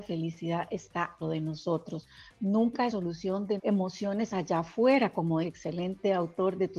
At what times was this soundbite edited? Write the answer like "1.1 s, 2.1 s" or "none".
1.2 s, 2.9 s, 3.6 s, 5.4 s